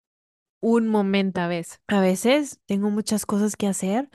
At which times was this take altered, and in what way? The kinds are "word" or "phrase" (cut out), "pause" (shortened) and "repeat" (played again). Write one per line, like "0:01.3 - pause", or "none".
0:01.3 - word
0:01.8 - pause

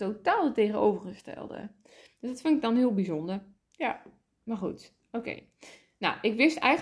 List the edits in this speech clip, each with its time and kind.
none

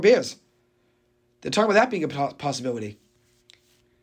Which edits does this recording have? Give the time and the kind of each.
none

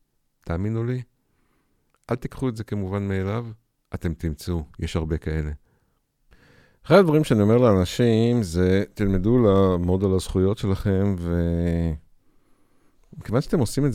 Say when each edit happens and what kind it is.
none

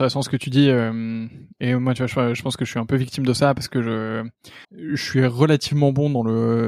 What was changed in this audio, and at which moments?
0:04.6 - pause

